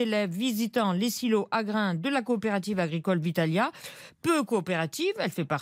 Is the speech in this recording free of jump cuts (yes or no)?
yes